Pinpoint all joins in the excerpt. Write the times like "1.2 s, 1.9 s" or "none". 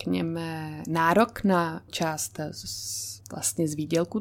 1.9 s, 3.2 s

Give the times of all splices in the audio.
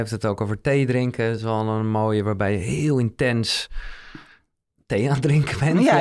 none

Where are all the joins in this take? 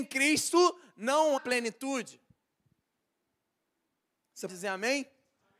1.4 s, 4.5 s

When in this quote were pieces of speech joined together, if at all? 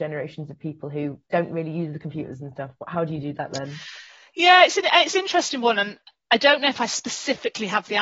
none

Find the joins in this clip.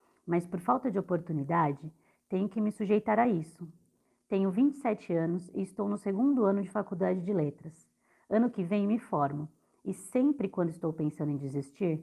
none

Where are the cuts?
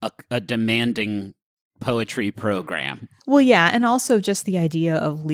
none

